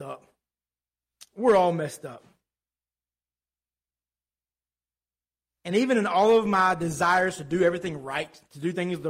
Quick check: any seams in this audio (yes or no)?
no